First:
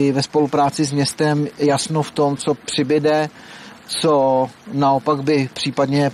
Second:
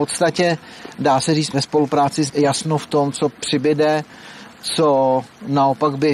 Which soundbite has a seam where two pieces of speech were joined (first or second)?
second